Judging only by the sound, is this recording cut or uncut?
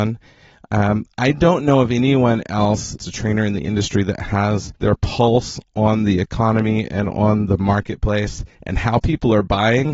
cut